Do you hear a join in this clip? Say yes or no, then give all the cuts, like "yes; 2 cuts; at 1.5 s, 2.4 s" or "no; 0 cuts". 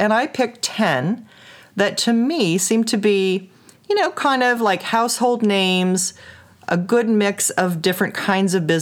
no; 0 cuts